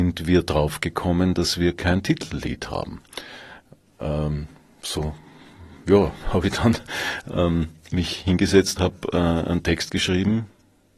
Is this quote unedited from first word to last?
no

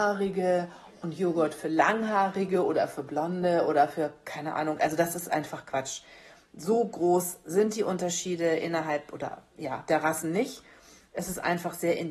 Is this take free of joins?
yes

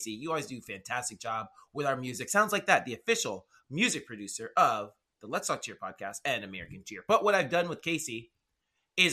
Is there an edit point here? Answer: no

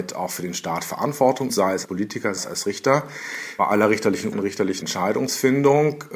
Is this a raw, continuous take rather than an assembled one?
no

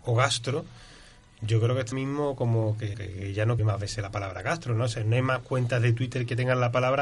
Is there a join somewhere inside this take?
yes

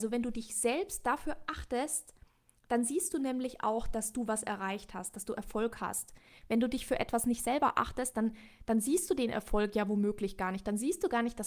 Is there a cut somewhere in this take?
no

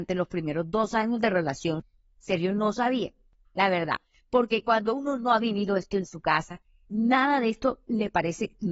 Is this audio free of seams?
yes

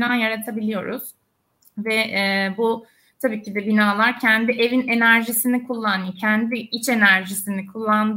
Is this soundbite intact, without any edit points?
yes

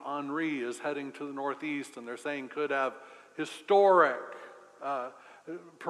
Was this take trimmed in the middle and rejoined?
no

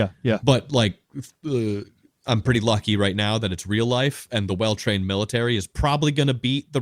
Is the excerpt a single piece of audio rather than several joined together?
yes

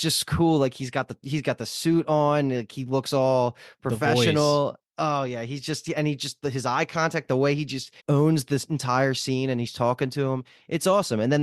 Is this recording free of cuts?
no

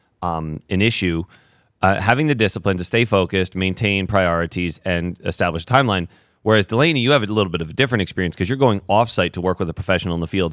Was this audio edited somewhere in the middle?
no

